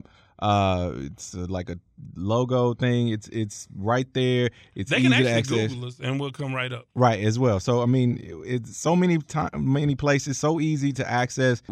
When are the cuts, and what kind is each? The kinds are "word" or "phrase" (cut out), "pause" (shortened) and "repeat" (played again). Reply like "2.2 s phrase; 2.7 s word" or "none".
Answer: none